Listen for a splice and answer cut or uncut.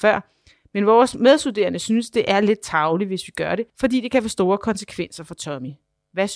cut